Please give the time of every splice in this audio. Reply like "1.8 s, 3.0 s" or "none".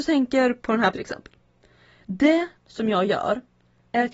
0.9 s, 2.6 s